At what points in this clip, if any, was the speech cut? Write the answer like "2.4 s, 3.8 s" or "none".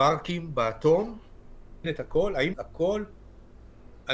1.8 s, 2.5 s